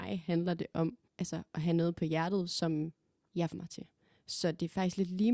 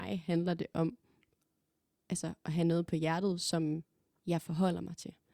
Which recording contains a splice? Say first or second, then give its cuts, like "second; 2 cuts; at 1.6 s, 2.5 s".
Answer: first; 2 cuts; at 1.1 s, 3.5 s